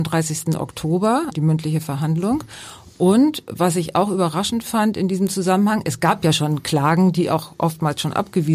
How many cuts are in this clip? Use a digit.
1